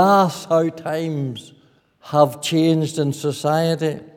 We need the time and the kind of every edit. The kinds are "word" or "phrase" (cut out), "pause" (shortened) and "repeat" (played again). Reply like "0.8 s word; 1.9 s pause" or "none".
1.8 s pause